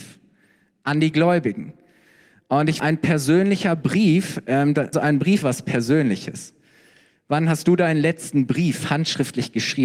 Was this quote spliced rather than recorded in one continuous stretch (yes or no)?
yes